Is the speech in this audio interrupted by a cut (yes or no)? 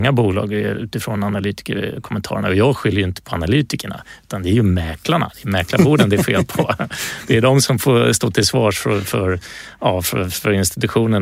no